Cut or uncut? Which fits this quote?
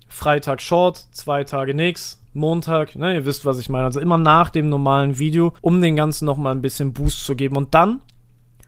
cut